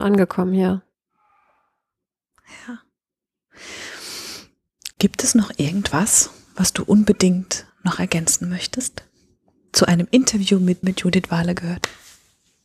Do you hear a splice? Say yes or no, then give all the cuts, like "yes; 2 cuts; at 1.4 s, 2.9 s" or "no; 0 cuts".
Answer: yes; 4 cuts; at 4.9 s, 7.7 s, 9.7 s, 10.8 s